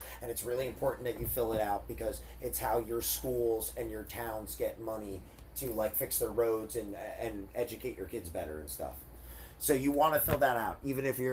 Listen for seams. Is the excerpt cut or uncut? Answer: uncut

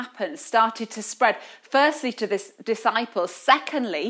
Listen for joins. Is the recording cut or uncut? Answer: uncut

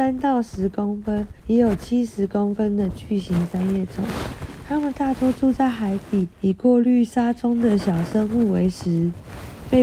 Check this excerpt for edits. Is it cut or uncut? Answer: cut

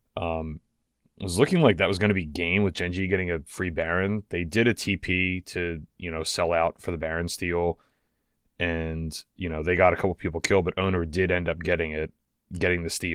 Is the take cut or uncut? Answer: uncut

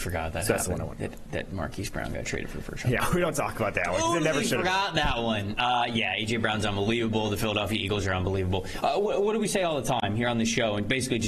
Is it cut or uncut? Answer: uncut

